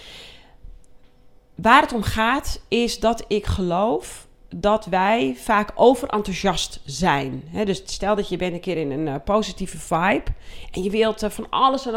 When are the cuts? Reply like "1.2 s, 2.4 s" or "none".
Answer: none

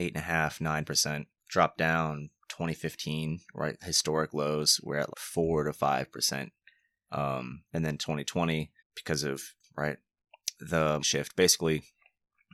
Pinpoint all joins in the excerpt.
1.4 s, 5.1 s, 7.7 s, 8.8 s, 9.6 s, 11.0 s

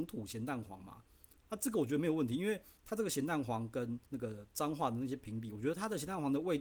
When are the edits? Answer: 1.4 s, 2.8 s, 4.1 s

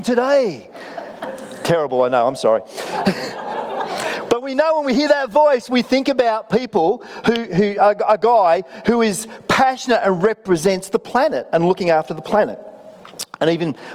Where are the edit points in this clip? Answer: 7.5 s

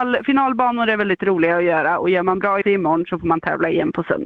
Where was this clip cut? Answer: 2.6 s

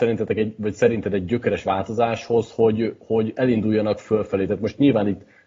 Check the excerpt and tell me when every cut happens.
none

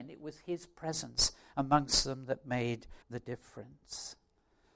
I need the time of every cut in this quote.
3.0 s

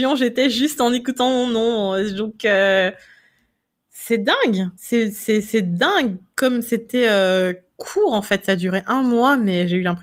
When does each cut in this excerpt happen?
4.8 s

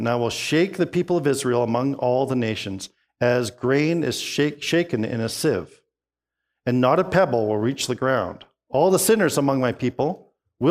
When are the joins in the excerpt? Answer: none

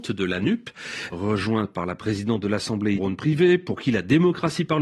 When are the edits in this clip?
1.1 s, 3.0 s

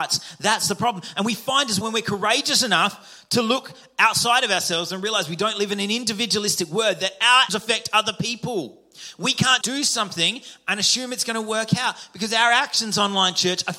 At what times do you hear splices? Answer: 1.8 s, 7.5 s, 9.6 s

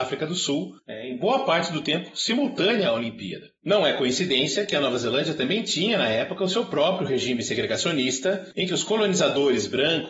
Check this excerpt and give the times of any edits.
none

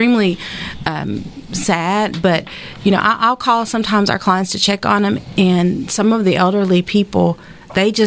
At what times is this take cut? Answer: none

